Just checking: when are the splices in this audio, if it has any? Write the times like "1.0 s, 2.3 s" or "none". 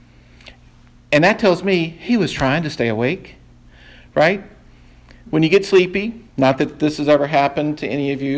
6.3 s